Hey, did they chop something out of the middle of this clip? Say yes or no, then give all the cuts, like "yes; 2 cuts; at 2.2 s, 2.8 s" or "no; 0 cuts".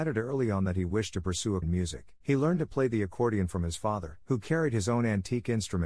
yes; 3 cuts; at 1.6 s, 2.2 s, 4.2 s